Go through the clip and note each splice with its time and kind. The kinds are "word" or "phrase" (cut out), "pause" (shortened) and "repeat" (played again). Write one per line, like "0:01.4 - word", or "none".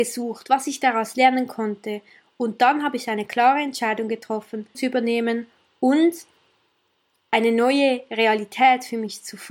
0:04.7 - word